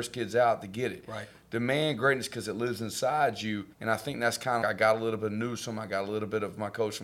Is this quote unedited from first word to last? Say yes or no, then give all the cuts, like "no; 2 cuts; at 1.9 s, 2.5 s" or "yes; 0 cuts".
no; 2 cuts; at 3.7 s, 4.6 s